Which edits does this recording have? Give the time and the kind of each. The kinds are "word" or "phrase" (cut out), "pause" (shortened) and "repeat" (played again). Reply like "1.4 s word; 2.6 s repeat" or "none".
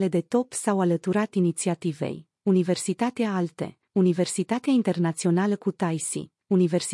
none